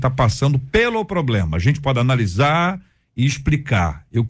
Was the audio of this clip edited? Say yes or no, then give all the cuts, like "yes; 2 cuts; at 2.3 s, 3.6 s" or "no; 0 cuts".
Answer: no; 0 cuts